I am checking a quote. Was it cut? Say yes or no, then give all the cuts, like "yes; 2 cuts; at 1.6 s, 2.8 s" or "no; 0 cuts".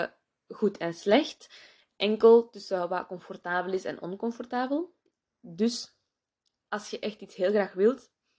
no; 0 cuts